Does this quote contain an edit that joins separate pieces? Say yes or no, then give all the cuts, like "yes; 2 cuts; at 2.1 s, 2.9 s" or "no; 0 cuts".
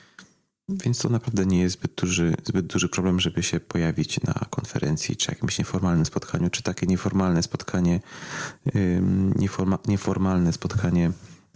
no; 0 cuts